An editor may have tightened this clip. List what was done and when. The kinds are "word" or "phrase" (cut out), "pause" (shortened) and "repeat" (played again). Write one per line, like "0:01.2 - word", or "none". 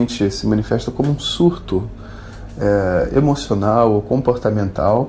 none

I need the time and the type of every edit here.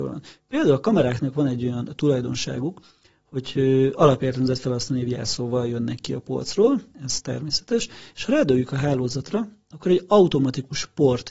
none

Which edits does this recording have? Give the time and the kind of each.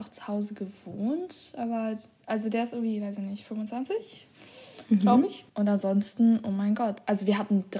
0:05.5 - pause

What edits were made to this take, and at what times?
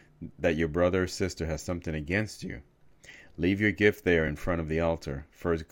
none

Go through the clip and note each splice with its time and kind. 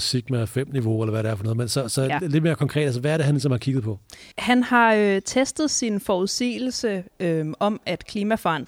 0:04.3 - pause

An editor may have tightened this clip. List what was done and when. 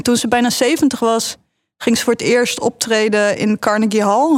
none

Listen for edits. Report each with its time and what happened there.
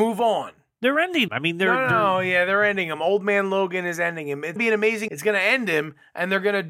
0:01.3 - word
0:04.6 - word
0:05.1 - word

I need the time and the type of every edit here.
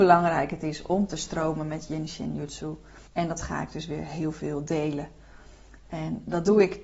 0:03.1 - pause

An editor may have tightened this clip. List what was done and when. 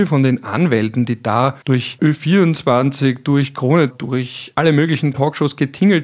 0:01.6 - pause
0:03.9 - word

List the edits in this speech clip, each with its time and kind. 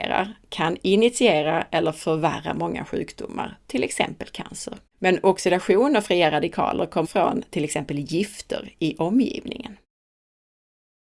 0:04.9 - pause
0:07.0 - word

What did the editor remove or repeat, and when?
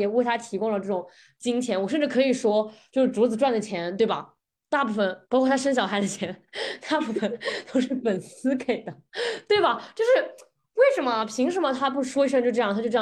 0:05.2 - pause

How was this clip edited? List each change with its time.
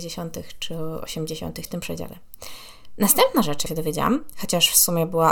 0:01.7 - word
0:03.7 - word

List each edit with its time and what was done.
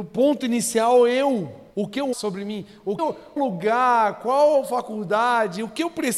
0:01.7 - pause
0:02.1 - word
0:03.0 - word
0:03.4 - word

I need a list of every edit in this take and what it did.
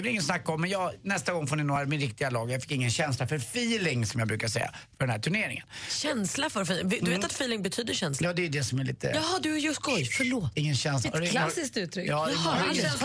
none

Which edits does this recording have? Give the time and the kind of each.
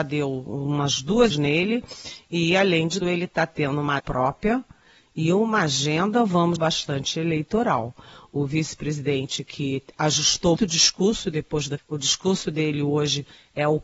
0:01.3 - word
0:03.0 - word
0:04.0 - word
0:06.6 - word
0:10.6 - word
0:11.8 - word

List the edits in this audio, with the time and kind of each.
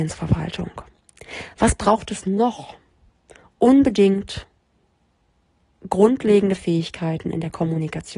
none

